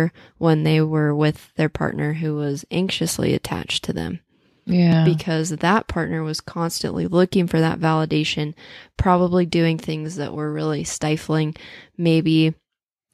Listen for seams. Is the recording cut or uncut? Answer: uncut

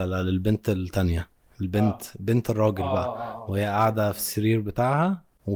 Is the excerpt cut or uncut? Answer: uncut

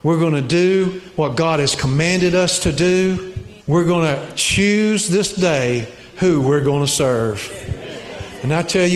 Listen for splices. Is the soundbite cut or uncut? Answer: cut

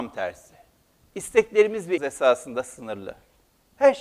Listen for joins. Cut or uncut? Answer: cut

